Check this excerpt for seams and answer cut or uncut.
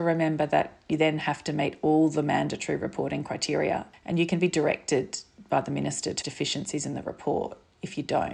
cut